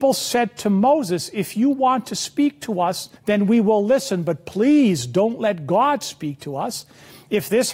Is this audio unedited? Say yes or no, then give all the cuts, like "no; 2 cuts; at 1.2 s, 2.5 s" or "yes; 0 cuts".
no; 1 cut; at 3.2 s